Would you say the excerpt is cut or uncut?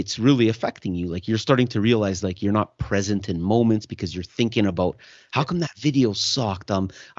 uncut